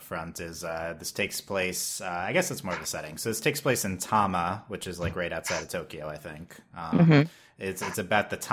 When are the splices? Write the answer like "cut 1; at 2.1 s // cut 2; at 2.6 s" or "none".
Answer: none